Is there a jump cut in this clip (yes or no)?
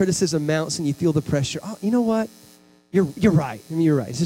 no